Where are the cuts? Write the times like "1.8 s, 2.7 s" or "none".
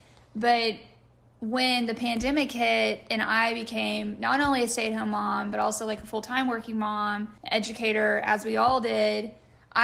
7.4 s